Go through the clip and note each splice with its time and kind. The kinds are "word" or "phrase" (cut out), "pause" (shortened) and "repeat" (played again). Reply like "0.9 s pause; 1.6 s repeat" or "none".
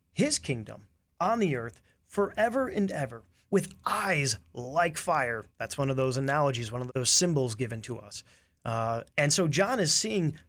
5.5 s pause; 6.9 s word; 9.1 s pause